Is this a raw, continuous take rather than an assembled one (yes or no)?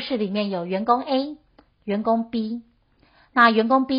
yes